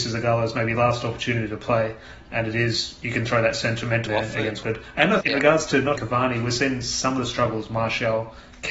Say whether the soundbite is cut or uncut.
cut